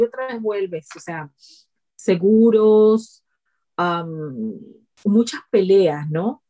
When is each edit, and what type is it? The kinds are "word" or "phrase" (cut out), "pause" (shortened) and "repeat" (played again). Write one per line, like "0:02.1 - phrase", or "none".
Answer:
none